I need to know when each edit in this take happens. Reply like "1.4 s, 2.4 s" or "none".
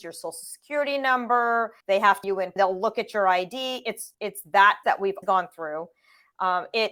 1.8 s, 2.2 s, 2.6 s, 4.1 s, 4.8 s, 5.2 s